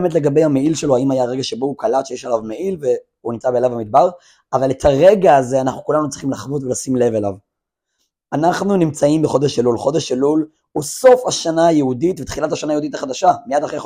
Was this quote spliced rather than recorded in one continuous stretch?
no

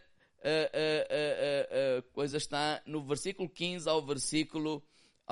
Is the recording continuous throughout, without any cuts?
yes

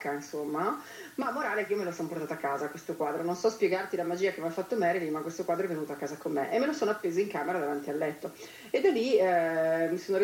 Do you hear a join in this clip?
no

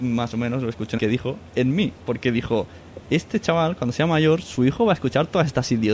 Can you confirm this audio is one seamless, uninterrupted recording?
no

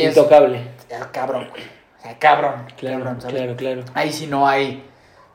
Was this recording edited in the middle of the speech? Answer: no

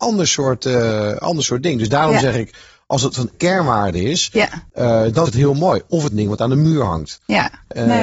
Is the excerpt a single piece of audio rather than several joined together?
no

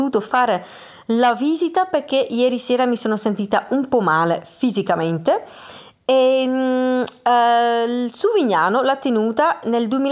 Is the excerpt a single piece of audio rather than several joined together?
yes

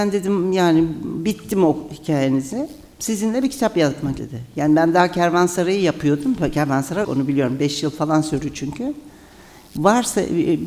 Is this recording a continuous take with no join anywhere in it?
no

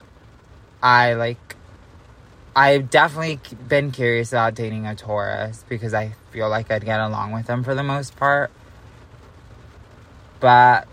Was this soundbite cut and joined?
yes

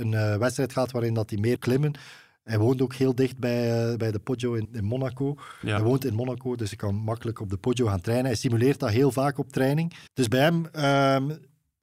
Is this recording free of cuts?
no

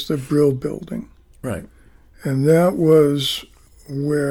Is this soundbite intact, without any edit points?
yes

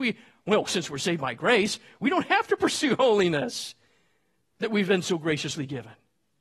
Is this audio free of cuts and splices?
yes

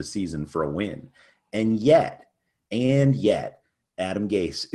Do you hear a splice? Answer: no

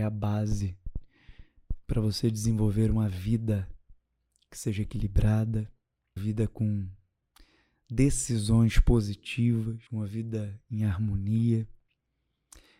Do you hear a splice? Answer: yes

